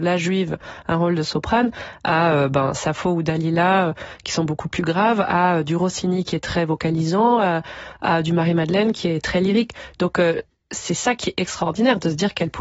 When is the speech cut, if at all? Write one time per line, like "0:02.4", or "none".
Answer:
none